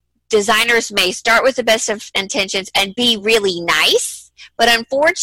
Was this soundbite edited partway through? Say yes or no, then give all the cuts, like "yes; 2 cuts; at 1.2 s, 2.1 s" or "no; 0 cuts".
no; 0 cuts